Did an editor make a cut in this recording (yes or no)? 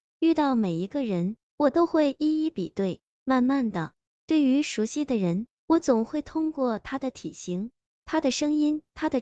no